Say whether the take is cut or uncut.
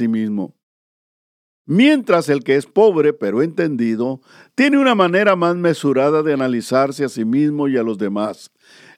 uncut